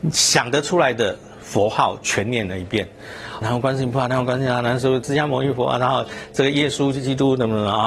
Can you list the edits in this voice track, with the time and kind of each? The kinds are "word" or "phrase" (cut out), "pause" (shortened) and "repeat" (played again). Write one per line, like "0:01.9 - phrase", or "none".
0:03.4 - word